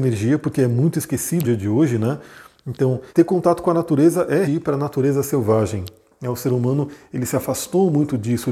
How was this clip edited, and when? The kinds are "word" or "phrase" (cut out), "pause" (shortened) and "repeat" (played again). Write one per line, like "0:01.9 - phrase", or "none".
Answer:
0:01.4 - word
0:03.1 - pause
0:04.4 - word